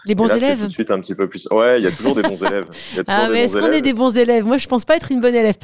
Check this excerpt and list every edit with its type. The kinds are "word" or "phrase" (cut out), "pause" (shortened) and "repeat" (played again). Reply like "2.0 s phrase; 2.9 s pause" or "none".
none